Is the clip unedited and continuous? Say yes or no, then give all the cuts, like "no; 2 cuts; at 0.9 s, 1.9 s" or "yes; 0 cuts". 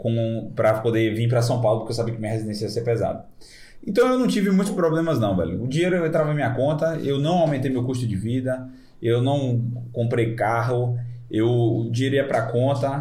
yes; 0 cuts